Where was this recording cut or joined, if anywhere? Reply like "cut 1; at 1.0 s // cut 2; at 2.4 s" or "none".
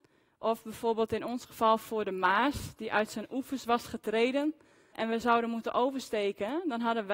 cut 1; at 4.9 s